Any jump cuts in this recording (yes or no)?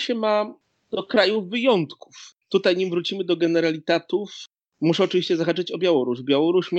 yes